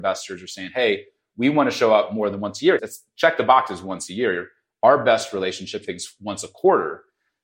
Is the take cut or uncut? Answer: cut